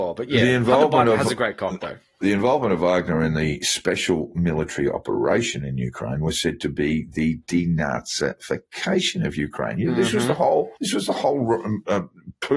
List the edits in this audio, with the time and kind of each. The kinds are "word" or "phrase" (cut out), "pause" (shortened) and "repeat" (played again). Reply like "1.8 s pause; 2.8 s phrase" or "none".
10.8 s pause